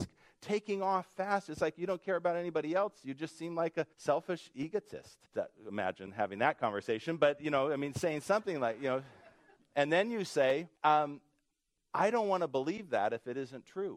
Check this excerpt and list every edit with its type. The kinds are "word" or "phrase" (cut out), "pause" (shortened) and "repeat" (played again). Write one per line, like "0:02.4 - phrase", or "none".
0:03.9 - pause
0:05.3 - pause
0:09.6 - pause
0:10.8 - pause